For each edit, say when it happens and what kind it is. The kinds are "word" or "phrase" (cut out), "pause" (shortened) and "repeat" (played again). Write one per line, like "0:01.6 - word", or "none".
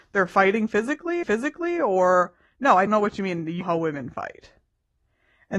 0:01.2 - repeat
0:02.9 - word
0:03.6 - word